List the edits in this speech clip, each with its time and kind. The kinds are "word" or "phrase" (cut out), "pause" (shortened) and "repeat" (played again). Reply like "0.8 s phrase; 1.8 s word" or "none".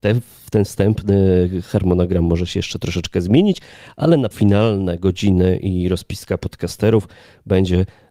4.3 s word